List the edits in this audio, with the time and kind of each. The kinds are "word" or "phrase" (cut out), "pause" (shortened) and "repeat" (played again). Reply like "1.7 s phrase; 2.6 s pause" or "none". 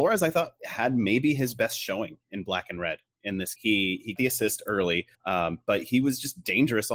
3.6 s word; 4.2 s word; 5.1 s pause

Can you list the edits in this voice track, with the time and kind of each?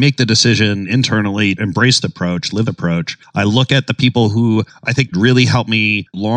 1.6 s word; 2.0 s word; 2.7 s word; 5.1 s word

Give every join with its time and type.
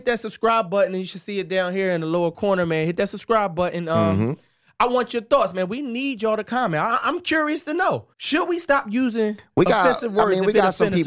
8.1 s pause

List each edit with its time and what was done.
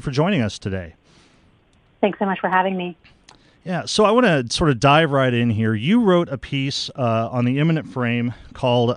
none

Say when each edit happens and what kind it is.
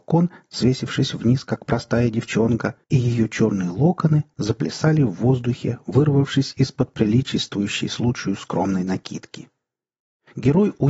2.8 s pause

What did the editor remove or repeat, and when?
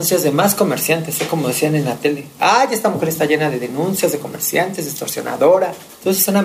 none

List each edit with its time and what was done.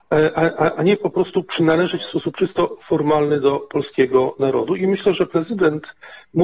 none

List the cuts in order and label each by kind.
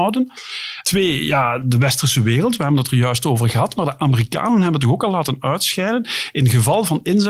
none

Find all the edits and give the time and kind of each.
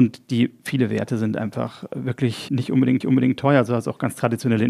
2.5 s word; 3.0 s repeat

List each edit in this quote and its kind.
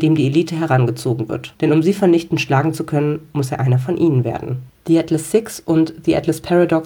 none

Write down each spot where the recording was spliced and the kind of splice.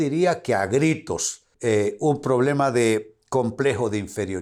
1.5 s pause

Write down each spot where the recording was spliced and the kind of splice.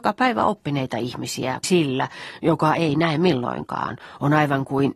1.6 s word

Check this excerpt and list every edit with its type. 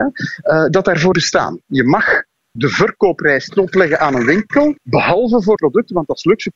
1.1 s word; 2.6 s phrase; 3.5 s word; 4.8 s pause; 5.6 s word

